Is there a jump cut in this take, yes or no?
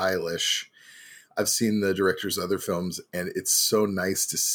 no